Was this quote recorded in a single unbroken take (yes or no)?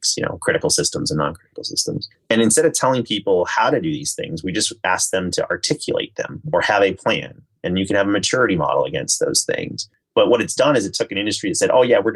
yes